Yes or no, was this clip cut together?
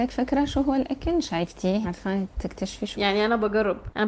yes